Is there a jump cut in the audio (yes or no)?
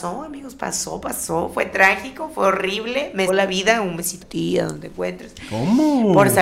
yes